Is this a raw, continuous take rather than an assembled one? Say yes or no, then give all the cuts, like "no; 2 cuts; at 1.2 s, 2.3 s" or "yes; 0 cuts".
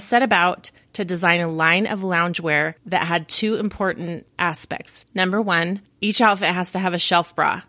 no; 1 cut; at 2.8 s